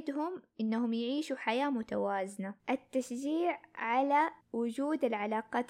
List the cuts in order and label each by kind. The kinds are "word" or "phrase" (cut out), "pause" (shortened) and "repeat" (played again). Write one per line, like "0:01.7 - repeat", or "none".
0:02.6 - pause
0:04.4 - pause